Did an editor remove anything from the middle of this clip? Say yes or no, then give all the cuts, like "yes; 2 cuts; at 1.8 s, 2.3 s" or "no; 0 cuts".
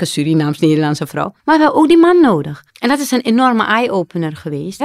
yes; 2 cuts; at 1.4 s, 2.7 s